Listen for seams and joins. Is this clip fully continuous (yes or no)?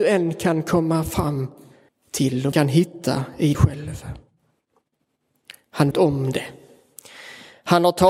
no